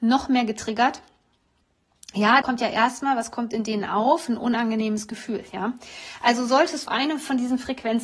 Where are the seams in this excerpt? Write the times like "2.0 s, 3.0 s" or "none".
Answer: 2.4 s, 6.9 s